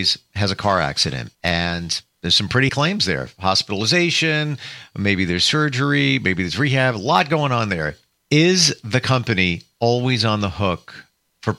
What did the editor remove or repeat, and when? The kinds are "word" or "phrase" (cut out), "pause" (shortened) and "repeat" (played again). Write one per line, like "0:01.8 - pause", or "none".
0:01.3 - pause
0:02.7 - word
0:08.2 - pause